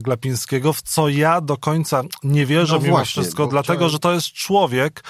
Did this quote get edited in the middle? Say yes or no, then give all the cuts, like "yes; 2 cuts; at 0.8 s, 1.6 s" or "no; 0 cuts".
no; 0 cuts